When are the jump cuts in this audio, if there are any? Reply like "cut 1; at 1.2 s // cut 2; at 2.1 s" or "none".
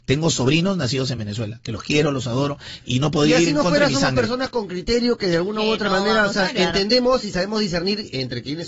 none